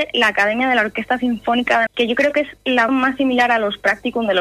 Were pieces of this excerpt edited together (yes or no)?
yes